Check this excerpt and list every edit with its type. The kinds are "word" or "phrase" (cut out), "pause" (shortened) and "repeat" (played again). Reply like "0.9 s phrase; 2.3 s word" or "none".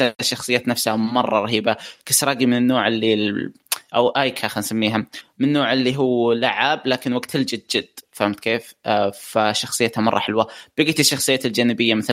none